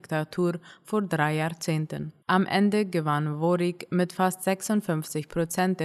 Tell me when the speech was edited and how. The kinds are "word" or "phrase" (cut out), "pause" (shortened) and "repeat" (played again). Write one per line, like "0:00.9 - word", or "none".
0:02.2 - pause